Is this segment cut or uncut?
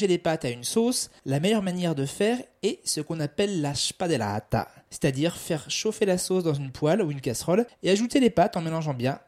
uncut